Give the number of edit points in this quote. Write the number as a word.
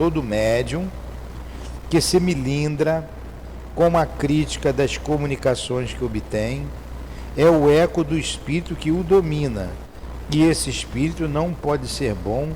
zero